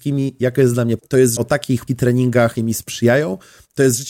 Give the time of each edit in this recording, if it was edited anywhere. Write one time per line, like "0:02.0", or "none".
0:01.0
0:01.4
0:01.9
0:02.6